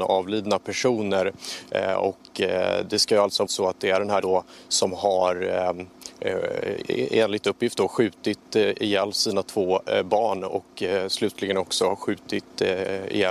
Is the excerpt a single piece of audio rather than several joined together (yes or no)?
no